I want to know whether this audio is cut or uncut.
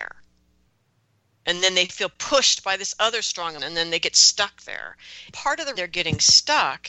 cut